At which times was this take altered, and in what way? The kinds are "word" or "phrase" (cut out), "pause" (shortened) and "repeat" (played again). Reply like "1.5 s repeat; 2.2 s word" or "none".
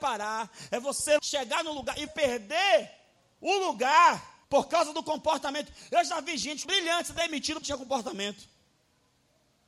1.2 s word; 2.1 s word; 4.4 s pause; 6.6 s phrase; 7.6 s phrase